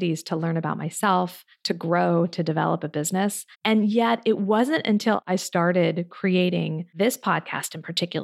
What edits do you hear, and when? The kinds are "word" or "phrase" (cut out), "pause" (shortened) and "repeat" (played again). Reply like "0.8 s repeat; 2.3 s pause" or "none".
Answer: 3.5 s pause

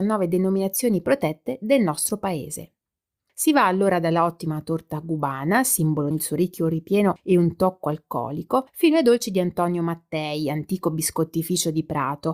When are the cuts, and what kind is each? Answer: 6.1 s phrase

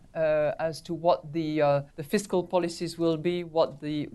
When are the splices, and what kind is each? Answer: 1.9 s pause

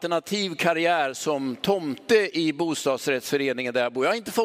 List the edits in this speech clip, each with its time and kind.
none

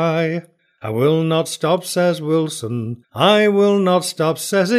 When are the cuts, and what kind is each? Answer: 3.0 s pause

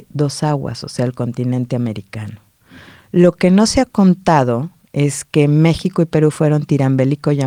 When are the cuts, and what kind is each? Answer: none

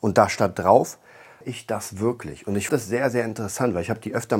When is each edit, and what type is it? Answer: 1.4 s word; 2.7 s word

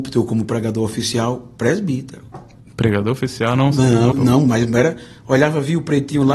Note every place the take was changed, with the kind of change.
4.1 s word

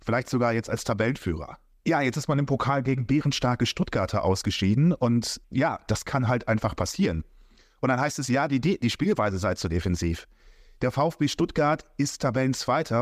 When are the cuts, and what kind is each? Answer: none

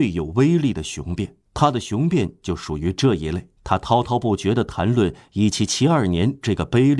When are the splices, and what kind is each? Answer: 1.4 s pause; 3.6 s pause

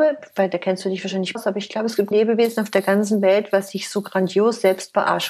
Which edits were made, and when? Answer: 1.3 s word; 2.1 s word

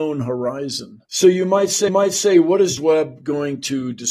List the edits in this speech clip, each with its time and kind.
1.0 s pause; 1.9 s repeat; 2.8 s word

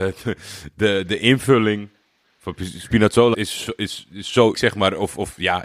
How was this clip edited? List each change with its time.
3.3 s word; 4.5 s word

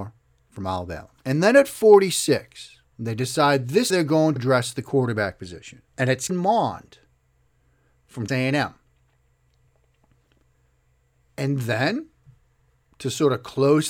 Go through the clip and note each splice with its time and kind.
1.2 s pause; 2.9 s pause; 3.9 s phrase; 4.4 s word; 5.9 s pause; 6.3 s word; 8.3 s word

